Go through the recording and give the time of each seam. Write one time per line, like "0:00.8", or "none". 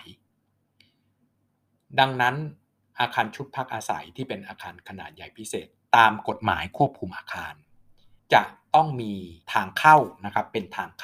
0:08.2
0:09.4